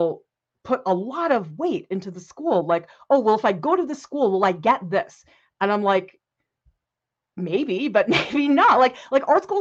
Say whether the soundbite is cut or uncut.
uncut